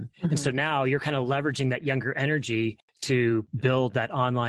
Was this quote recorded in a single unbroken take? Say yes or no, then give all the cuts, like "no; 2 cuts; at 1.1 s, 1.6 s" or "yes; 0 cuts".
yes; 0 cuts